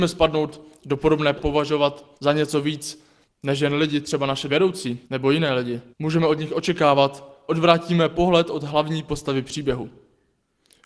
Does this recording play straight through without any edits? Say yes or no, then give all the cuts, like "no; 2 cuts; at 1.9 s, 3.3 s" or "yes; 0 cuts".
no; 7 cuts; at 1.4 s, 2.2 s, 3.2 s, 4.5 s, 5.0 s, 5.9 s, 7.5 s